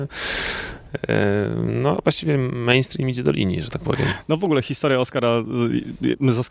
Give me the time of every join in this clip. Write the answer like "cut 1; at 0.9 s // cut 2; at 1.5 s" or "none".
none